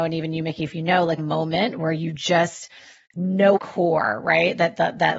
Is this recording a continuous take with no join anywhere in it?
no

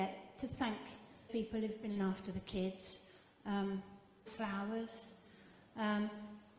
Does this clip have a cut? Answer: yes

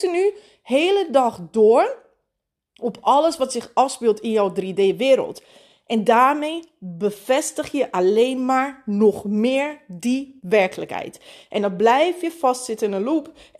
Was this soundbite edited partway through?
no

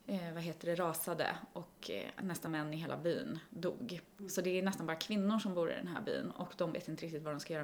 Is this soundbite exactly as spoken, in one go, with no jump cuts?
no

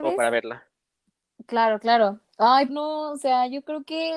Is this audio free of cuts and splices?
no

